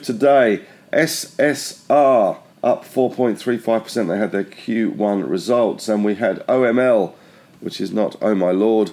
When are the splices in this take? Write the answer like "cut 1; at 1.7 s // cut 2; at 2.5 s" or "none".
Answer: cut 1; at 2.5 s